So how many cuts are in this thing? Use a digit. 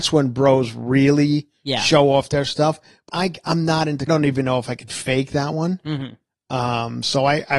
2